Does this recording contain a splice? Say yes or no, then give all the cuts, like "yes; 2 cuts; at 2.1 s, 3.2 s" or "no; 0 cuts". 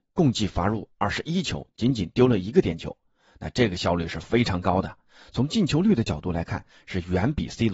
no; 0 cuts